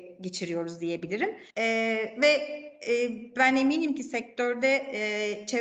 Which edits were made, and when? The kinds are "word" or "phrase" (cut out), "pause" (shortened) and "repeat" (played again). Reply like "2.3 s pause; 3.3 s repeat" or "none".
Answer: 1.5 s pause